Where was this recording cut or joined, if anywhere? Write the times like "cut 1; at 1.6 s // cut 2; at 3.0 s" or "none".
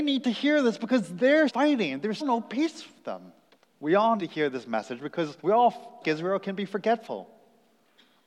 cut 1; at 1.5 s // cut 2; at 2.2 s // cut 3; at 3.5 s // cut 4; at 4.2 s // cut 5; at 5.4 s // cut 6; at 6.0 s